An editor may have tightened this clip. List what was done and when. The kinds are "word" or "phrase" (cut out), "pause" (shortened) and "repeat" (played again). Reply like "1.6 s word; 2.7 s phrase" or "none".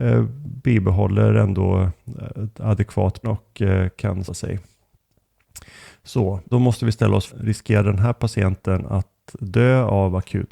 3.2 s word; 4.3 s word; 6.5 s word; 7.3 s word